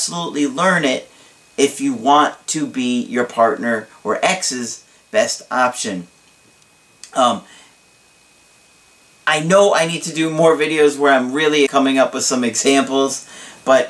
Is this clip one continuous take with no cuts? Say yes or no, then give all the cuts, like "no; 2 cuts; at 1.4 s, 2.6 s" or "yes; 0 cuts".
no; 1 cut; at 11.7 s